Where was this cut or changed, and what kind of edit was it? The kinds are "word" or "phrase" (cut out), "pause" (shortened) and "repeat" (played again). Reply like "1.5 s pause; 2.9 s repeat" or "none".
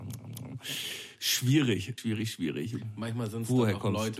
2.0 s word